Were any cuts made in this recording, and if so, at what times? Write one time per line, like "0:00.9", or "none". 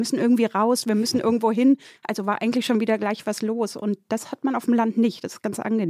0:02.0